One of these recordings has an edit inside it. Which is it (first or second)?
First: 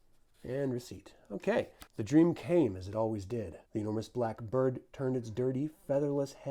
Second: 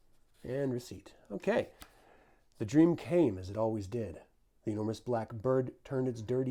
first